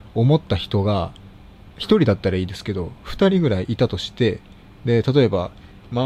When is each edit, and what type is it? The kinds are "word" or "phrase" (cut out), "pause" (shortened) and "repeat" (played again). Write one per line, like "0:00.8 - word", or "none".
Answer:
none